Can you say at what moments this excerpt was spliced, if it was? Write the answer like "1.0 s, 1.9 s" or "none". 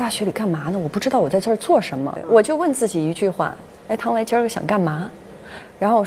none